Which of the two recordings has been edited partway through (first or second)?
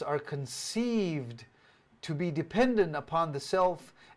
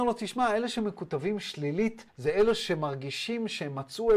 second